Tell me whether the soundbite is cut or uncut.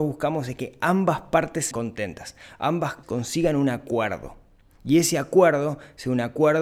cut